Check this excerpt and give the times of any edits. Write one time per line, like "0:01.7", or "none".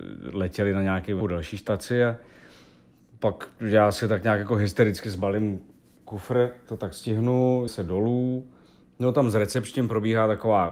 0:01.2
0:05.0
0:06.7
0:07.7